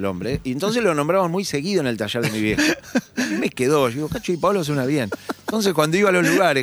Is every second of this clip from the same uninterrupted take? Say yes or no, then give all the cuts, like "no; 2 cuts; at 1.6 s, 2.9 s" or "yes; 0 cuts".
yes; 0 cuts